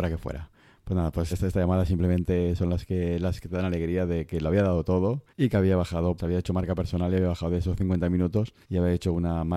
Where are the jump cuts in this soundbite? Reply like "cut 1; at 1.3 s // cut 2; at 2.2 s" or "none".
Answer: cut 1; at 1.3 s // cut 2; at 5.3 s // cut 3; at 6.2 s // cut 4; at 8.6 s